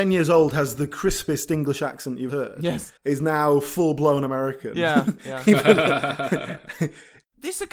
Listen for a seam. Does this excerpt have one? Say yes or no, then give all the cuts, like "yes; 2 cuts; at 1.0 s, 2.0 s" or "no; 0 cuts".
yes; 2 cuts; at 2.3 s, 3.0 s